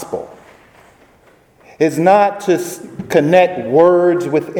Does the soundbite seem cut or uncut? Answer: uncut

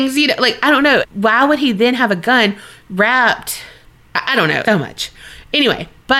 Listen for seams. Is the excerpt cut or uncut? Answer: cut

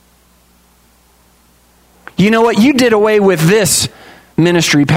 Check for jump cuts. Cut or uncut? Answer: uncut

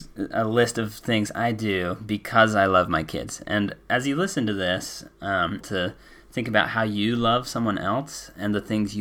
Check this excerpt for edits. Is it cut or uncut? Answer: cut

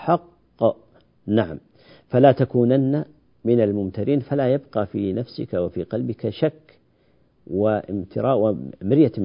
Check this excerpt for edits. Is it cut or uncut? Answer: uncut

